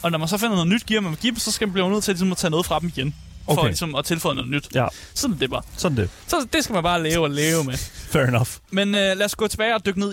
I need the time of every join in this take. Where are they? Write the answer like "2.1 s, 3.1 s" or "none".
none

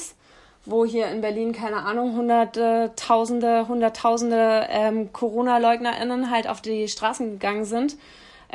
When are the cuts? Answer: none

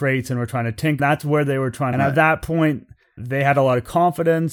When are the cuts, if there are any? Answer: 1.0 s, 1.9 s, 3.2 s

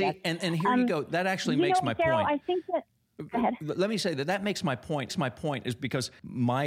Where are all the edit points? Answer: 5.1 s

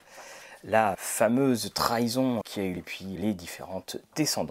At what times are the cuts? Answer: 0.9 s, 2.4 s, 2.8 s, 3.2 s

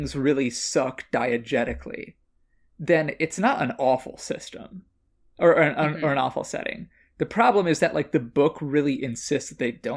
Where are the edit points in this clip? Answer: none

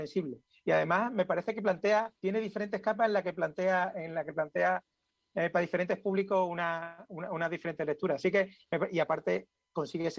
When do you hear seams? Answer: 2.2 s

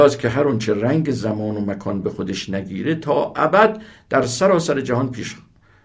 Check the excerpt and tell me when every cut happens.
none

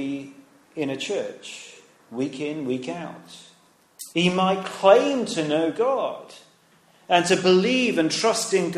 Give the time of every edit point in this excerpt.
4.1 s

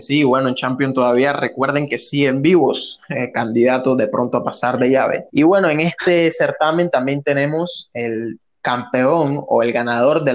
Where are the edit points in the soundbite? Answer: 5.3 s

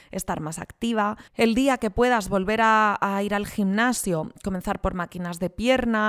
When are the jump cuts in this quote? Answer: 1.3 s

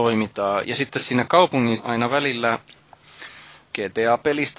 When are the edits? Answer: 1.8 s

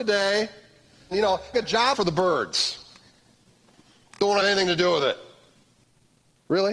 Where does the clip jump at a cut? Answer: 1.1 s, 1.5 s, 1.9 s, 4.4 s

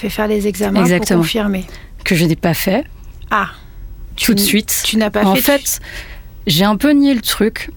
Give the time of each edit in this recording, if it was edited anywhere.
4.1 s

